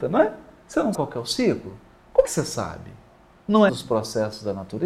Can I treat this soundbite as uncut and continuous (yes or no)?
no